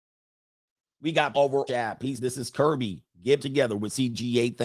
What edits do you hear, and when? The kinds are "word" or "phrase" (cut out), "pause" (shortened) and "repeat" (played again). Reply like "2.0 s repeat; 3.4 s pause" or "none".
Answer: 1.3 s word; 1.7 s phrase; 2.2 s word; 3.4 s word